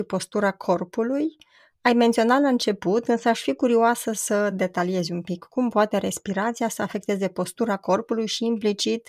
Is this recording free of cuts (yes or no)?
yes